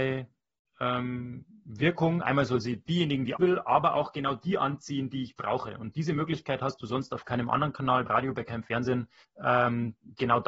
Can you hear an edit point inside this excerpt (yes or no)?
yes